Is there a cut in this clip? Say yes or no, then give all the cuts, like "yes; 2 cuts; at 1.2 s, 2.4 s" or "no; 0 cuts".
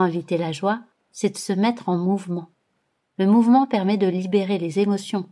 no; 0 cuts